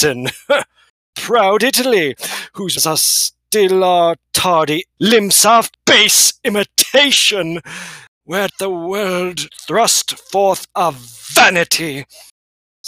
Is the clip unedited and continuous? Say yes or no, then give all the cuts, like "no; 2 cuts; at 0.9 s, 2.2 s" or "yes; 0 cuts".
no; 6 cuts; at 1.1 s, 2.8 s, 5.0 s, 5.7 s, 8.5 s, 9.5 s